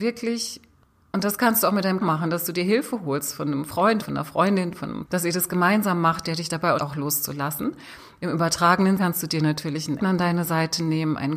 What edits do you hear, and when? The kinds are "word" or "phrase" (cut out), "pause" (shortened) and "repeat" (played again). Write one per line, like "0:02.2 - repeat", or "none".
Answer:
0:02.0 - word
0:04.0 - word
0:05.0 - word
0:06.8 - word
0:09.0 - word
0:10.0 - word